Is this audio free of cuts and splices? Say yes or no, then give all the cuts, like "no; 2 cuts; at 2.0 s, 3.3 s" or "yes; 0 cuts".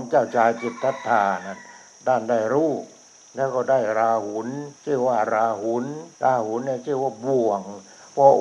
no; 2 cuts; at 4.8 s, 6.1 s